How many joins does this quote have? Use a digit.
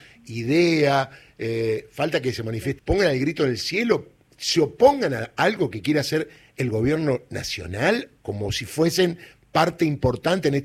1